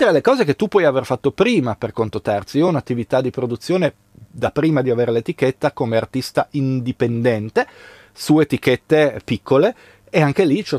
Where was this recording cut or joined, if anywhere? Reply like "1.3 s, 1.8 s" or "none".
none